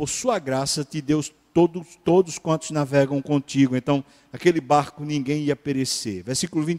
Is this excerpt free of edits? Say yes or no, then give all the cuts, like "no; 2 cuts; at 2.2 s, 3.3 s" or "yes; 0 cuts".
yes; 0 cuts